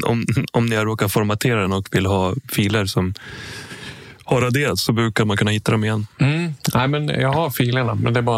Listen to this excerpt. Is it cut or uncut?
uncut